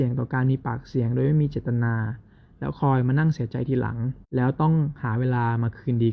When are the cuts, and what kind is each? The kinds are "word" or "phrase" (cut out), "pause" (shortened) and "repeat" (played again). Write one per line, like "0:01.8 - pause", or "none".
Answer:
0:04.2 - pause